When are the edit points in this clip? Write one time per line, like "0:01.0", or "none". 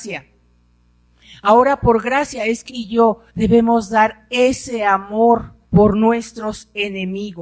0:02.7
0:03.3
0:05.6